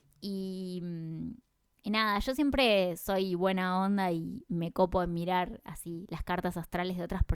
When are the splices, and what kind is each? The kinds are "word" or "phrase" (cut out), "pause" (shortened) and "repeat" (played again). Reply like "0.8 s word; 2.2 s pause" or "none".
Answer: none